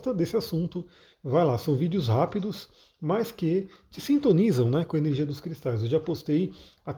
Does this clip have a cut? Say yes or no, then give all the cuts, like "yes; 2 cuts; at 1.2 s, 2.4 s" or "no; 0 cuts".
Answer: no; 0 cuts